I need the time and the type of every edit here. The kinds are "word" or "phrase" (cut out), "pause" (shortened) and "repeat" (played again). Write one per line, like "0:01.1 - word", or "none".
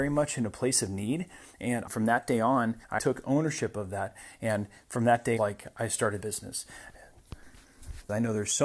0:02.8 - pause
0:05.4 - phrase
0:06.2 - word